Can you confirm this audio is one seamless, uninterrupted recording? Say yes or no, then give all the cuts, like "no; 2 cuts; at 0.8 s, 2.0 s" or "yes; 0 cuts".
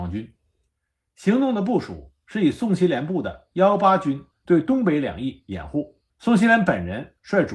no; 2 cuts; at 4.3 s, 6.1 s